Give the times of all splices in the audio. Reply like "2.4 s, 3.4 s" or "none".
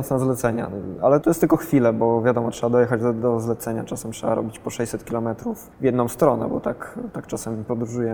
1.2 s, 5.7 s